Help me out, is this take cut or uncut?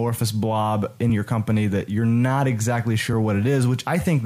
uncut